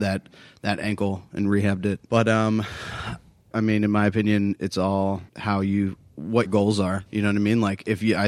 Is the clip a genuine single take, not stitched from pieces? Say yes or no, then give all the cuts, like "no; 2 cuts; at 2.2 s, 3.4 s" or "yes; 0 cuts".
no; 5 cuts; at 2.0 s, 3.5 s, 5.3 s, 6.5 s, 7.1 s